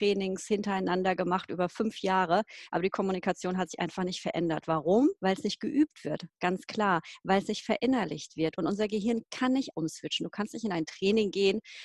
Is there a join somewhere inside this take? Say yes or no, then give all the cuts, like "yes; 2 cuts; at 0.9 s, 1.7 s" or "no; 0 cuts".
yes; 2 cuts; at 5.2 s, 9.7 s